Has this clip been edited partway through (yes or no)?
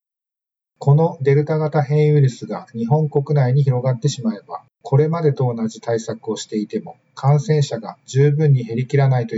yes